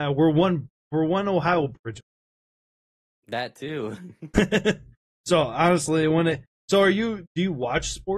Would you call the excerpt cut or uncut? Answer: uncut